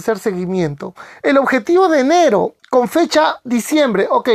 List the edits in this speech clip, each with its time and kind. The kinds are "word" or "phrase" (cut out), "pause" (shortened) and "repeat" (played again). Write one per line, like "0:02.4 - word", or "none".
0:02.6 - pause